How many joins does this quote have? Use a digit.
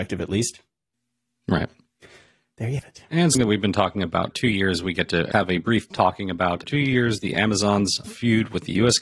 7